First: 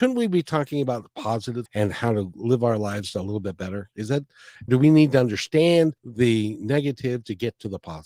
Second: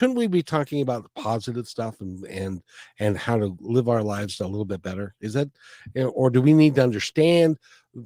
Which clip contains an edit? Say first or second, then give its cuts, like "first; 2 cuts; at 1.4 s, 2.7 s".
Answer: first; 3 cuts; at 1.7 s, 4.7 s, 6.0 s